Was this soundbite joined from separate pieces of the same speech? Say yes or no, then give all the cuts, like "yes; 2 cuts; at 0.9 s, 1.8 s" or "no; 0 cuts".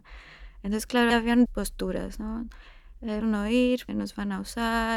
yes; 4 cuts; at 1.1 s, 1.5 s, 3.2 s, 3.9 s